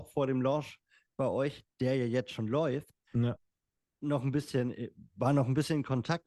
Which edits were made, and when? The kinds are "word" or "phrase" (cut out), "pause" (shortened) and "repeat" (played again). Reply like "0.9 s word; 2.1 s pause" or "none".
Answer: none